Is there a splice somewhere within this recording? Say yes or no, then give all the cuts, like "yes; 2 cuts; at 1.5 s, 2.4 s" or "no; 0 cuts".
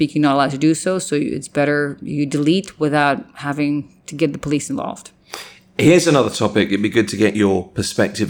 no; 0 cuts